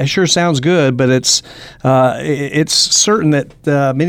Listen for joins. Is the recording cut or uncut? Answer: uncut